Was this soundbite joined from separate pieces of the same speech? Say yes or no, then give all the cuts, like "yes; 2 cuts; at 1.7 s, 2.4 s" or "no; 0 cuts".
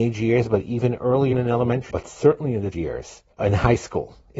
yes; 4 cuts; at 1.3 s, 1.9 s, 2.7 s, 3.3 s